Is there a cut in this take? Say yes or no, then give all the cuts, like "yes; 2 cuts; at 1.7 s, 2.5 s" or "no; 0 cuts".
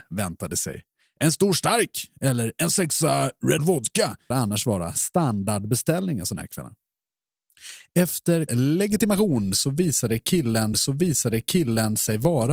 yes; 4 cuts; at 3.6 s, 4.3 s, 8.5 s, 10.7 s